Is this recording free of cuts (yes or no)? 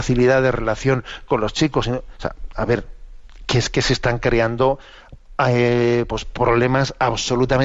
yes